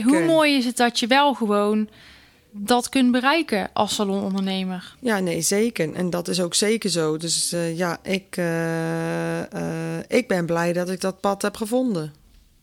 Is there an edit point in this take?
no; 0 cuts

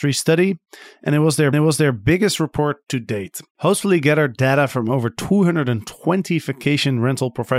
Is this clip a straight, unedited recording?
no; 2 cuts; at 1.5 s, 3.5 s

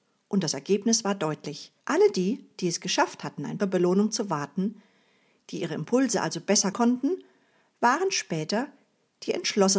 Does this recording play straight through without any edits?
no; 3 cuts; at 1.8 s, 3.6 s, 6.7 s

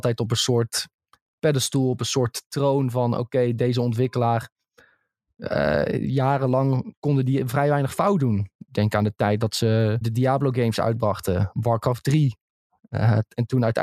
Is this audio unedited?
no; 1 cut; at 10.0 s

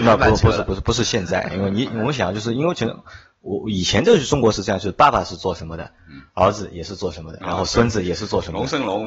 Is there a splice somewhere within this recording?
no; 0 cuts

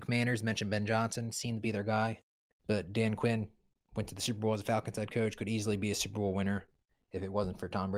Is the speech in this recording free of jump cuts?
yes; 0 cuts

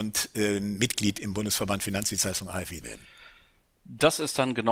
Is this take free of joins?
no; 1 cut; at 2.8 s

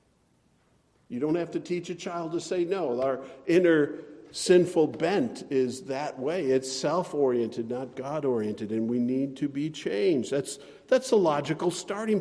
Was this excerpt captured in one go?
yes; 0 cuts

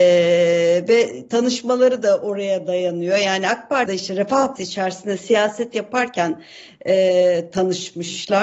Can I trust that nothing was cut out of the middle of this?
no; 2 cuts; at 3.9 s, 4.6 s

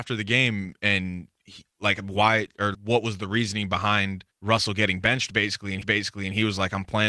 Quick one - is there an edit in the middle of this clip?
yes; 4 cuts; at 1.7 s, 2.7 s, 4.3 s, 5.8 s

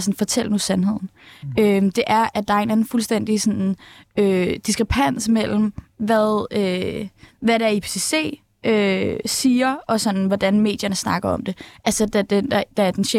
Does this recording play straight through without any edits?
yes; 0 cuts

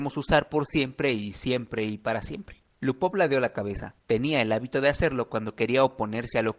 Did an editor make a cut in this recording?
yes; 2 cuts; at 2.7 s, 4.0 s

